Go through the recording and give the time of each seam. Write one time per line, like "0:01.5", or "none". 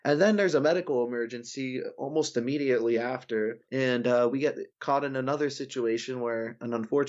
0:03.6
0:04.7